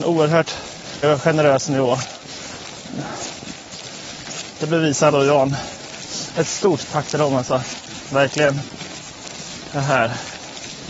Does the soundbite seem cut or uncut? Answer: cut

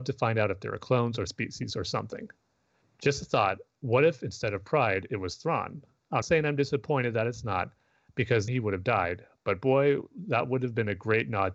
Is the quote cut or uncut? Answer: cut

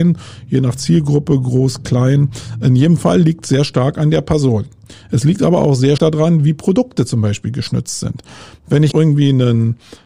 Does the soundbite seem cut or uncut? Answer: cut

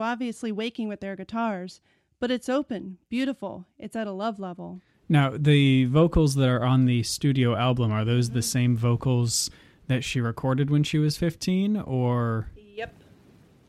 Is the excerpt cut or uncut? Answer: uncut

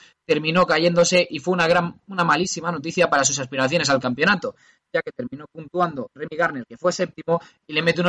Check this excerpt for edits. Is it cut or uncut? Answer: uncut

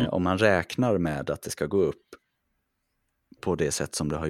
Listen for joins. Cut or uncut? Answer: uncut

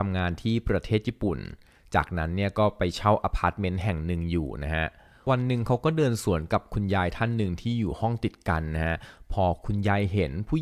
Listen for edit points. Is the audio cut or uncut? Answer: uncut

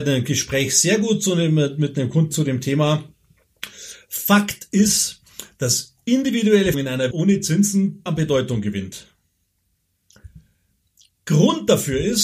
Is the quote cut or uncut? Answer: cut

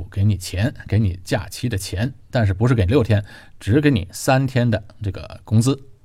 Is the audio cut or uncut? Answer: uncut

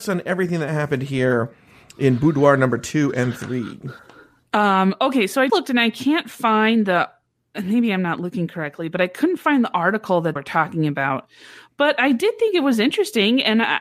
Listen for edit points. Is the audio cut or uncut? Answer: cut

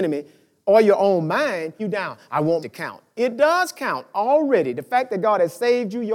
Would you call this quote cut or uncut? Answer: cut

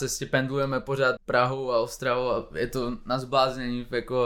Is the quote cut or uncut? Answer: cut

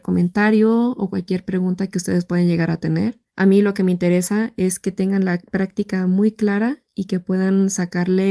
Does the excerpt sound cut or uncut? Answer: cut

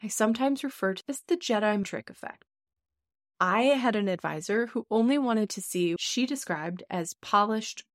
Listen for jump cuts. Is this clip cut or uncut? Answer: cut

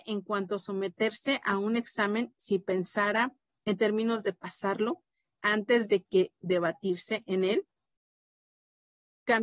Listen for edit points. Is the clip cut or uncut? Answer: uncut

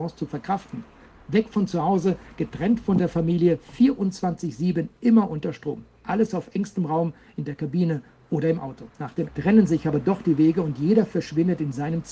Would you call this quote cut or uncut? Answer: cut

